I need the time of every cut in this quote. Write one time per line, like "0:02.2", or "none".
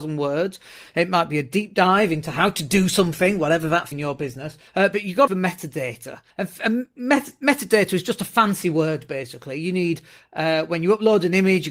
0:03.9
0:04.7
0:05.3
0:06.3